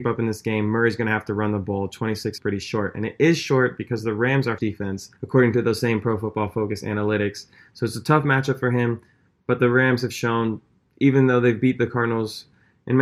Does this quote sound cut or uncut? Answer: cut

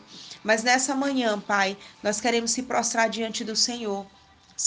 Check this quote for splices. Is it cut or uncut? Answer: uncut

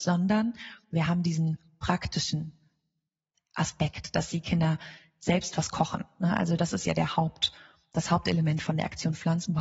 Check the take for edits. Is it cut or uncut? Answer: uncut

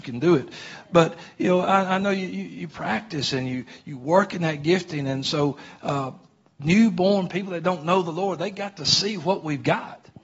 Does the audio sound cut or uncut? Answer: cut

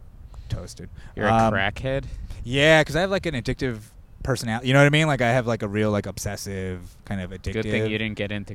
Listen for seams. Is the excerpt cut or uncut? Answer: uncut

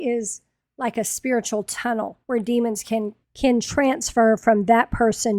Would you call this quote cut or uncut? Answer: cut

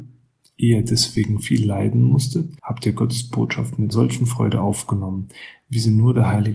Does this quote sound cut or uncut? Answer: cut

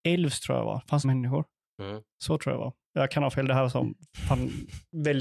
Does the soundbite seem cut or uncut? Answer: cut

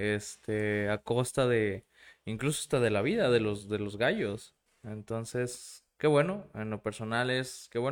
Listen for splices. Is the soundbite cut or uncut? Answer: uncut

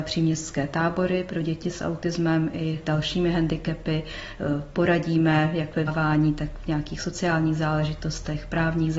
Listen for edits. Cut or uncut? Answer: cut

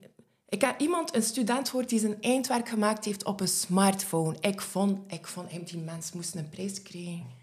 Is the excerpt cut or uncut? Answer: uncut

